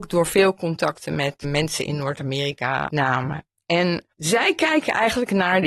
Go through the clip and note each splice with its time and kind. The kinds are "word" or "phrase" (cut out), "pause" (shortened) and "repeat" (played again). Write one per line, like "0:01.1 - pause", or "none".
0:01.4 - word
0:02.9 - phrase
0:04.1 - pause